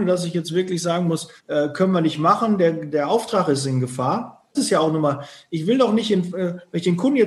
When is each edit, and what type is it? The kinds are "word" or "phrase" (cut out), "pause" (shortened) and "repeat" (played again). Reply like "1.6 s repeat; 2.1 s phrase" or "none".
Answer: 1.4 s pause; 4.5 s phrase

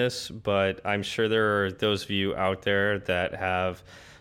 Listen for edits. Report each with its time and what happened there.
none

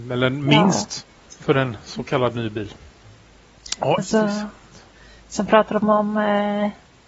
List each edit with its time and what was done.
1.2 s pause; 4.0 s word

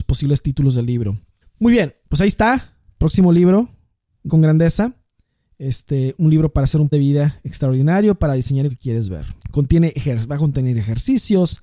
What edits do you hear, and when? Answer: 1.4 s pause; 2.0 s pause; 4.3 s word; 6.2 s word; 6.9 s word; 8.7 s phrase; 9.4 s pause

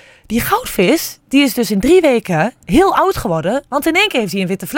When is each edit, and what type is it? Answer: none

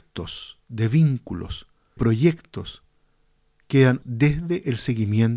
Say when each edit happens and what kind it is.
2.0 s word; 4.0 s word

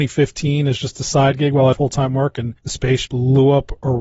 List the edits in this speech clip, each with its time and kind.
1.7 s phrase; 2.6 s pause; 3.1 s word

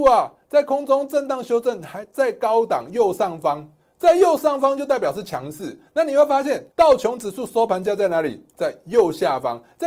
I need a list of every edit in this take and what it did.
6.7 s pause

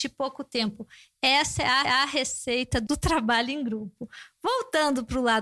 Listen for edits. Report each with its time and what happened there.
1.8 s repeat; 2.9 s word

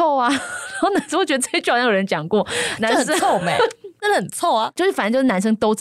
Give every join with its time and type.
2.8 s word

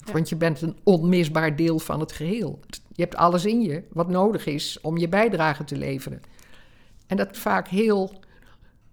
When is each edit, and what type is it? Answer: 7.3 s word

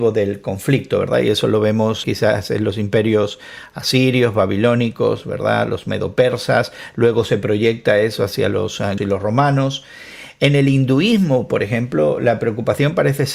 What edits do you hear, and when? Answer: 2.0 s word; 9.0 s word

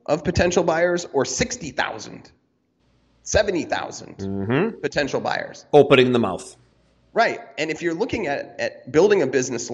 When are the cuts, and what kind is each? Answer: none

